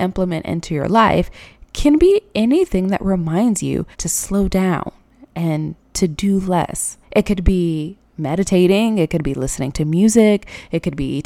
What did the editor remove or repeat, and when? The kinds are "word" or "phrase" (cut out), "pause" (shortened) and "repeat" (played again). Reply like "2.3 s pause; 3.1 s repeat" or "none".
3.9 s pause; 7.0 s pause